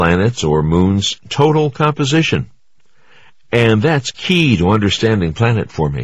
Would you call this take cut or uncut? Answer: uncut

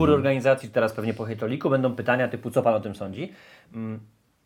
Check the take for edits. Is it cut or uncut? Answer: uncut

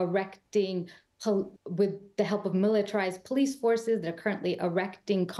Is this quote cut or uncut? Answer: cut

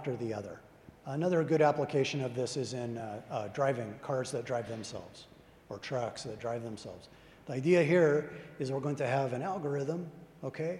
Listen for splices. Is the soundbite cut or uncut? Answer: uncut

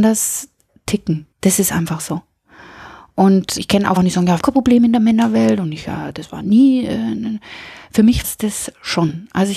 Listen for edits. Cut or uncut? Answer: cut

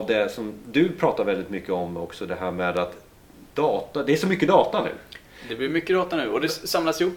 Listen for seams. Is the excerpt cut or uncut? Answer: uncut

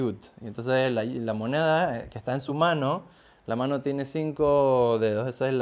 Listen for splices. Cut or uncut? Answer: uncut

